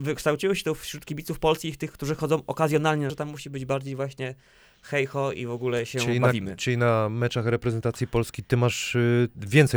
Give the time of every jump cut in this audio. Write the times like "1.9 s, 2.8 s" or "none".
3.1 s